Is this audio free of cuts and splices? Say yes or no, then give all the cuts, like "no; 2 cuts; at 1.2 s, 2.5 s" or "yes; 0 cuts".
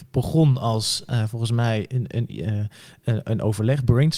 yes; 0 cuts